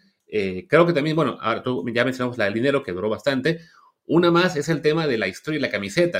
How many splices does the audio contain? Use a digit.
0